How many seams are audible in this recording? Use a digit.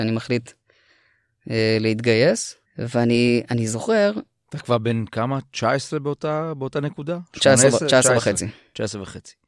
1